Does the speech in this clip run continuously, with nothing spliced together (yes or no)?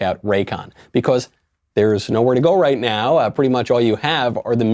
yes